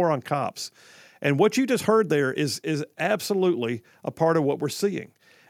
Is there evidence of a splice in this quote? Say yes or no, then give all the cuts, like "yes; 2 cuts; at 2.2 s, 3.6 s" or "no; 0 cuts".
no; 0 cuts